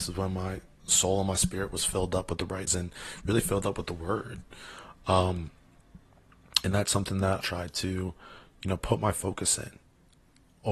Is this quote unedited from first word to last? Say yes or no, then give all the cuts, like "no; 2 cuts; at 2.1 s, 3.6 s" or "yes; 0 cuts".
no; 2 cuts; at 2.7 s, 7.4 s